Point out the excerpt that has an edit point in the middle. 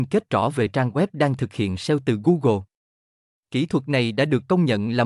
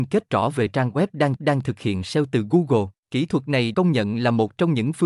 second; 3 cuts; at 1.4 s, 3.0 s, 3.7 s

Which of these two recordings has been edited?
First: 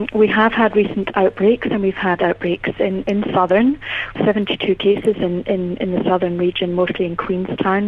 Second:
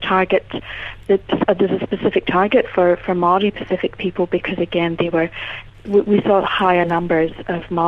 first; 1 cut; at 4.1 s

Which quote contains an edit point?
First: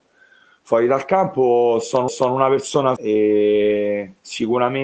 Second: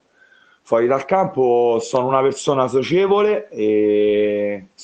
first; 2 cuts; at 2.1 s, 3.0 s

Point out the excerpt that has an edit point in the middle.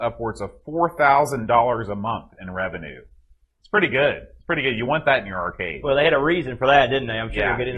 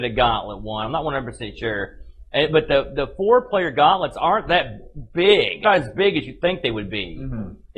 second; 1 cut; at 5.6 s

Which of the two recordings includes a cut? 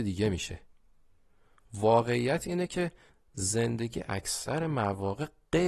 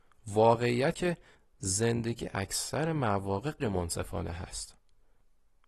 second; 2 cuts; at 0.9 s, 3.6 s

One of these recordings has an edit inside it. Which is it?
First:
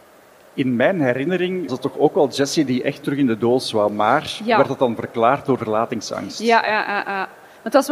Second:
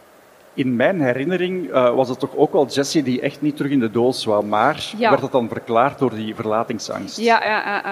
first; 3 cuts; at 1.7 s, 3.0 s, 5.6 s

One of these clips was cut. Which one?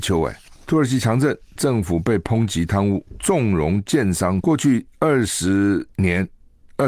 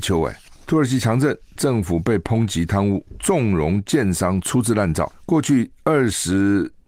first; 2 cuts; at 4.4 s, 5.9 s

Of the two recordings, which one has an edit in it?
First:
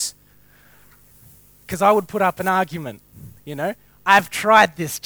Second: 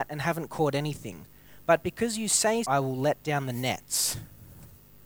second; 1 cut; at 2.6 s

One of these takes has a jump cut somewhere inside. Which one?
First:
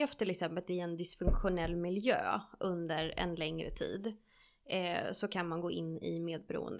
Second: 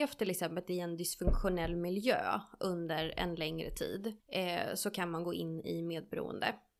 second; 1 cut; at 4.2 s

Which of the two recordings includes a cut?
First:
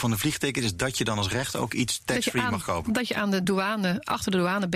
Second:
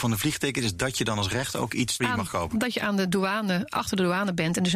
second; 1 cut; at 2.0 s

